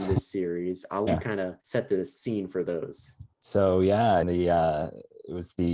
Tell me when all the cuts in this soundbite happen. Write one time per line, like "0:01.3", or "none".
0:01.1
0:01.6
0:03.3
0:04.2